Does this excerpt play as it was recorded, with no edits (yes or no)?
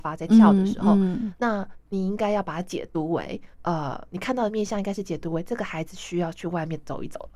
no